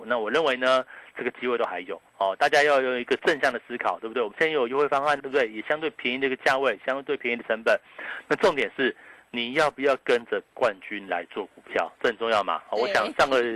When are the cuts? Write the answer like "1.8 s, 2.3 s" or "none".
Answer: 5.2 s